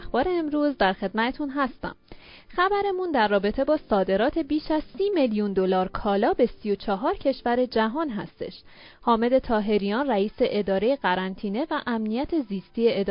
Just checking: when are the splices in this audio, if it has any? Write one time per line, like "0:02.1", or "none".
none